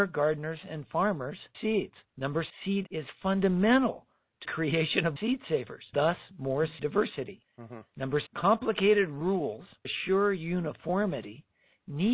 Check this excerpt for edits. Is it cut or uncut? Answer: cut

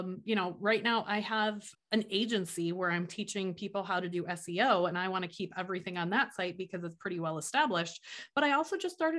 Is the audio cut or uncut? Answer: cut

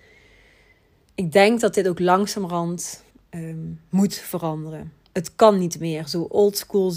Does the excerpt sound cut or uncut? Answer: cut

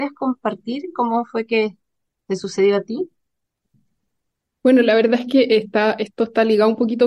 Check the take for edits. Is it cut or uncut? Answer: uncut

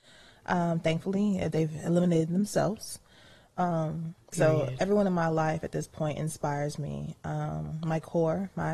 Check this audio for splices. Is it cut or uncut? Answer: uncut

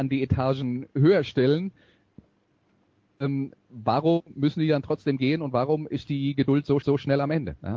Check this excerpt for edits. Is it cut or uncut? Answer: cut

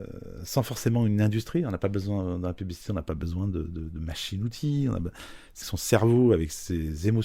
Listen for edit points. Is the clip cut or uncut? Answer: cut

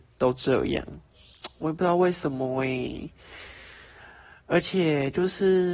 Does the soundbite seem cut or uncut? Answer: uncut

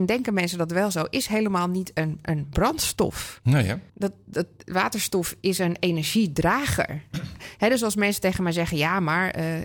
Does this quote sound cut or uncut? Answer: cut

